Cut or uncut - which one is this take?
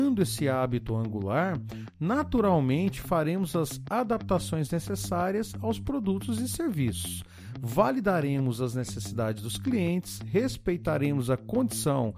uncut